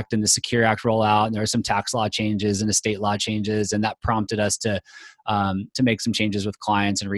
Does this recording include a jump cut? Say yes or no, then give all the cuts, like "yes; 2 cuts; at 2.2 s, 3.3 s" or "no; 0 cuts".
no; 0 cuts